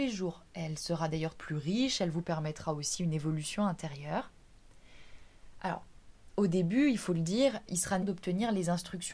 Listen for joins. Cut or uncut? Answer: cut